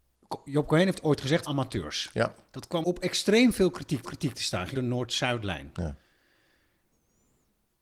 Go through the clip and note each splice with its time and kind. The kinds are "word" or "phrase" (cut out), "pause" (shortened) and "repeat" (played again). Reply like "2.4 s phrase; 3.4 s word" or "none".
1.5 s phrase; 2.8 s word; 4.0 s repeat; 4.7 s word

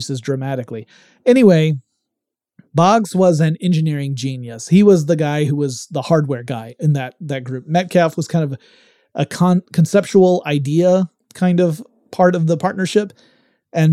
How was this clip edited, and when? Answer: none

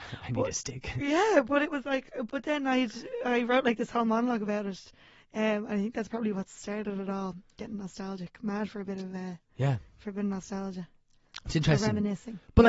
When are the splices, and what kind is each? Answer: none

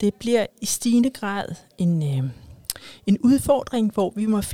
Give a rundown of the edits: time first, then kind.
none

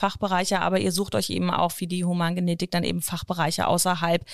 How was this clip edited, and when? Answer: none

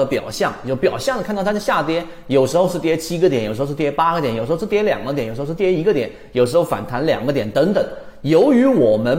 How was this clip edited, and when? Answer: none

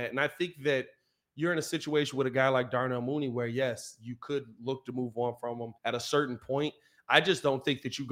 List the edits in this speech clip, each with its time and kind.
5.8 s pause

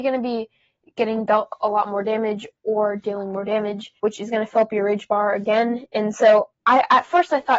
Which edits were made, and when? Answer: 4.0 s pause

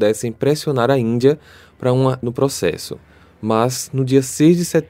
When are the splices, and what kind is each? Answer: 2.2 s word

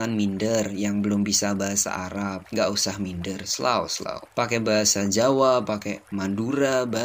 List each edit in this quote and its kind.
6.1 s pause

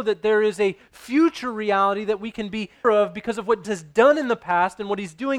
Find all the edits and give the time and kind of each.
2.8 s word; 3.6 s word

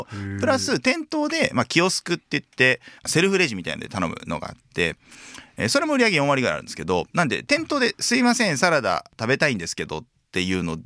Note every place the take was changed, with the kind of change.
3.0 s pause; 7.1 s pause

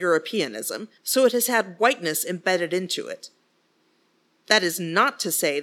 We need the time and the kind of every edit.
1.0 s pause

